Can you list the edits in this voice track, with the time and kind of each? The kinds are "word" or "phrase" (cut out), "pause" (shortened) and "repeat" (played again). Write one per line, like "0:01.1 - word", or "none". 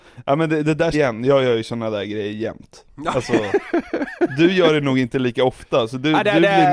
0:00.9 - phrase
0:02.9 - pause